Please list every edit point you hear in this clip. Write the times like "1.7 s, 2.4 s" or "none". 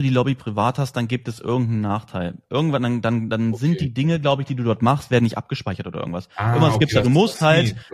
none